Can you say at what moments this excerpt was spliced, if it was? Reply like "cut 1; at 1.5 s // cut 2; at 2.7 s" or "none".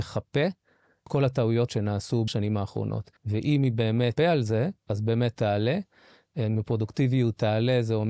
cut 1; at 1.1 s // cut 2; at 1.7 s // cut 3; at 2.3 s // cut 4; at 3.2 s // cut 5; at 4.2 s // cut 6; at 4.8 s // cut 7; at 5.4 s